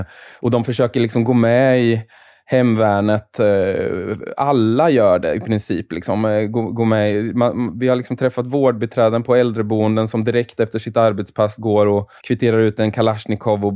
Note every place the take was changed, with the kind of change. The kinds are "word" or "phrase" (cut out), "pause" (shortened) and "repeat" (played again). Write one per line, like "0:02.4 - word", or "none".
0:12.2 - pause